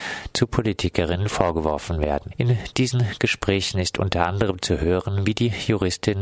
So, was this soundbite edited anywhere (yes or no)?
no